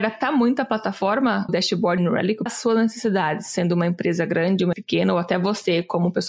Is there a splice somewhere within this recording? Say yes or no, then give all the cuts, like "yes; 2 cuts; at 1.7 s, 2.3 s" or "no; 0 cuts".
yes; 4 cuts; at 1.5 s, 2.0 s, 2.5 s, 4.7 s